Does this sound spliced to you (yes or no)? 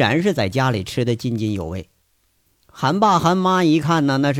no